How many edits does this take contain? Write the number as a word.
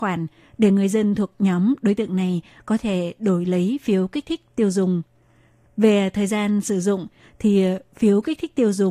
zero